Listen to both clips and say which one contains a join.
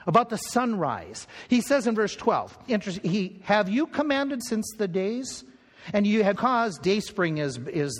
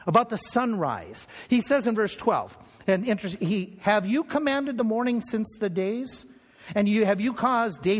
first; 3 cuts; at 2.7 s, 4.4 s, 6.4 s

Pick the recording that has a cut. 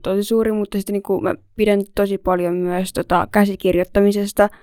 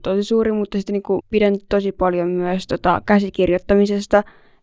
second; 1 cut; at 1.2 s

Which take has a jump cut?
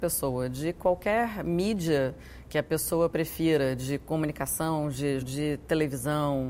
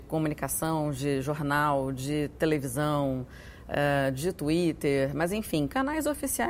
first; 1 cut; at 5.2 s

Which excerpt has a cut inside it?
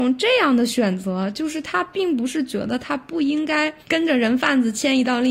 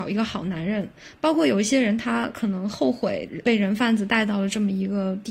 first; 1 cut; at 3.8 s

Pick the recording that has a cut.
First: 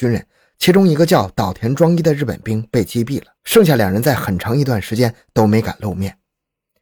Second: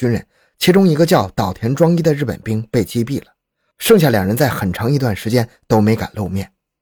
first; 1 cut; at 3.4 s

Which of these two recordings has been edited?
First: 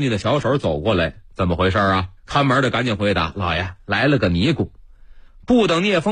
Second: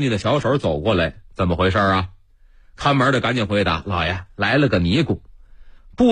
first; 1 cut; at 2.2 s

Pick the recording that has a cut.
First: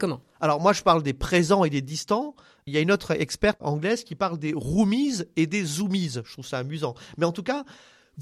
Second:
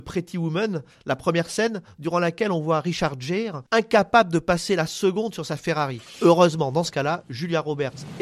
first; 1 cut; at 2.7 s

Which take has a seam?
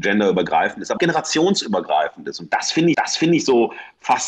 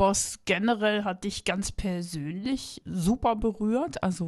first; 2 cuts; at 1.0 s, 2.9 s

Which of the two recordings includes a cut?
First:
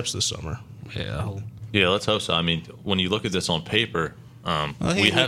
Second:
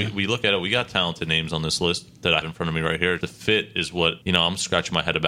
second; 3 cuts; at 2.4 s, 3.2 s, 4.2 s

